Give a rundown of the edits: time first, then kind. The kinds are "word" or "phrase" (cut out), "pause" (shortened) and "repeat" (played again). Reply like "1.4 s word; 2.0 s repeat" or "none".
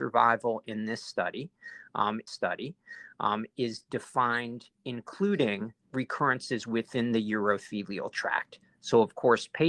2.3 s repeat; 5.8 s pause